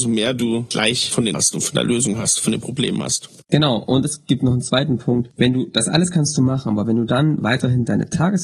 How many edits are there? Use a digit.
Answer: 1